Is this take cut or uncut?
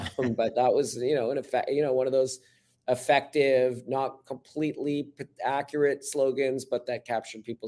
uncut